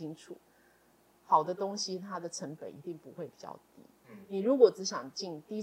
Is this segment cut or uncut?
uncut